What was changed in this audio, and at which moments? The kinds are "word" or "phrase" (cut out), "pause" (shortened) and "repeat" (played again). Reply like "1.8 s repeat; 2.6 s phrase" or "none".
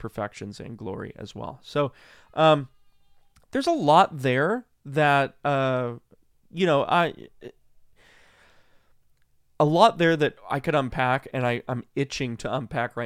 none